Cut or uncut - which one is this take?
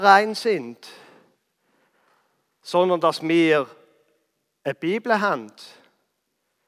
uncut